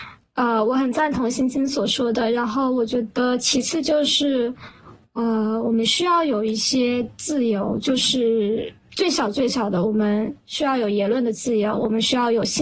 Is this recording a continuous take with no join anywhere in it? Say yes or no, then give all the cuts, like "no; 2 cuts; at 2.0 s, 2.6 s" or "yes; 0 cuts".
yes; 0 cuts